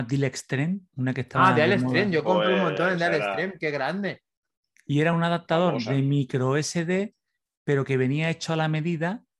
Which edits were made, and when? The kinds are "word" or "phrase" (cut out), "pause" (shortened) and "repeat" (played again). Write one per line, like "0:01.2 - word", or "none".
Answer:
none